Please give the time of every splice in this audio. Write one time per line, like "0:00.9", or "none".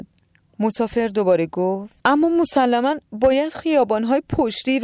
0:02.0